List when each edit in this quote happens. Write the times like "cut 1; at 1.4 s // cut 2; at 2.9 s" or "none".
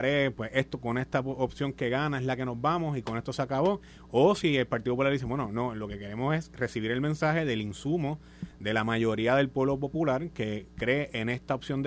none